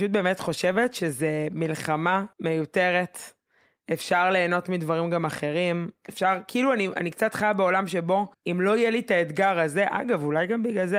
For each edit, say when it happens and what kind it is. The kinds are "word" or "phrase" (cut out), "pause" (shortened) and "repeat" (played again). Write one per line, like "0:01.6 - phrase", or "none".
0:02.3 - pause
0:08.3 - pause